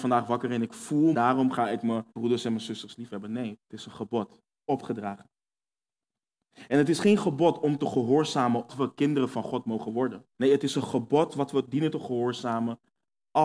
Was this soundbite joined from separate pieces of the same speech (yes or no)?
yes